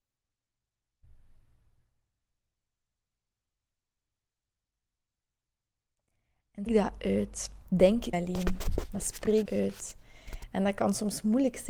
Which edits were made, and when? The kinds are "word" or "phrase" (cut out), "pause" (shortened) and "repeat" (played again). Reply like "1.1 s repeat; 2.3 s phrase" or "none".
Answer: 6.7 s word; 8.1 s word; 9.4 s word